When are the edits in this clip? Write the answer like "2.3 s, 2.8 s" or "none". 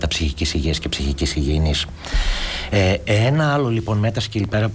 none